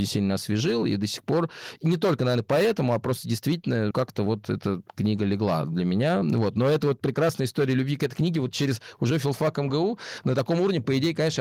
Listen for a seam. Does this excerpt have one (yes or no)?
yes